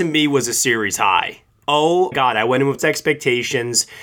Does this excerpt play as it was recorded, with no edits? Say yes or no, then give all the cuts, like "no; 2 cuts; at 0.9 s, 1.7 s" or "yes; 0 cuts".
no; 2 cuts; at 2.1 s, 2.8 s